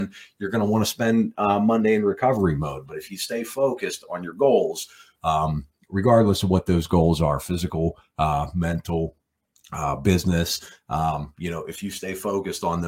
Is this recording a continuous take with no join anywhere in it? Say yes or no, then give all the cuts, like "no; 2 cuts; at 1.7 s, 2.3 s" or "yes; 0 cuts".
yes; 0 cuts